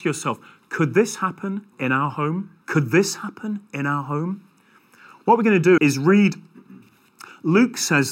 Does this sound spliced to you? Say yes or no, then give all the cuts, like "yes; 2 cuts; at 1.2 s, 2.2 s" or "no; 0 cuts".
yes; 3 cuts; at 1.7 s, 2.6 s, 5.8 s